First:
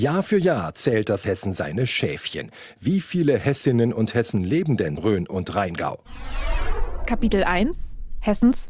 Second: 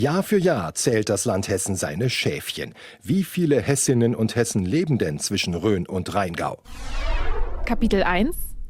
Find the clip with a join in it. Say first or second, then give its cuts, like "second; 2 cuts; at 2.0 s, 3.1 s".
first; 2 cuts; at 1.2 s, 5.0 s